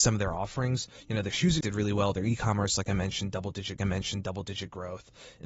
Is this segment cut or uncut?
cut